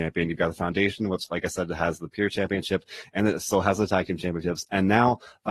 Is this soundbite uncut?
yes; 0 cuts

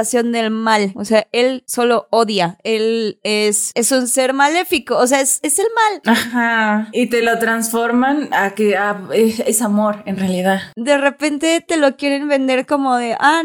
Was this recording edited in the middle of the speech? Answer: no; 0 cuts

